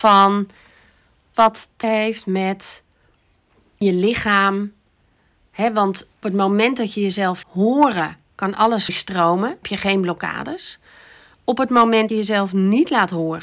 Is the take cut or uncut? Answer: cut